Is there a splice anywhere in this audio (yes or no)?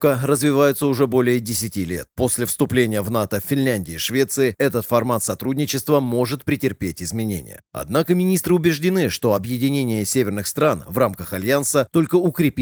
no